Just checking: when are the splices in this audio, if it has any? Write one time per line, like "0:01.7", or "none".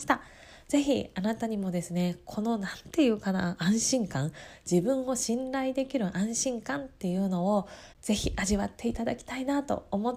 0:07.9